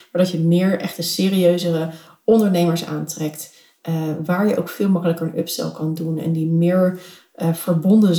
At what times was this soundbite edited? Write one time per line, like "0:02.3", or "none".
none